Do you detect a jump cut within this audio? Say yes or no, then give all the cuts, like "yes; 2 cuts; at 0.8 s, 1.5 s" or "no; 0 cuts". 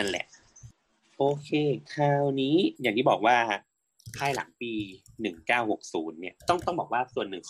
yes; 3 cuts; at 1.9 s, 2.8 s, 6.4 s